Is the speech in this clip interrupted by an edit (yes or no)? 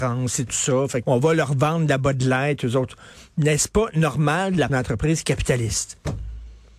yes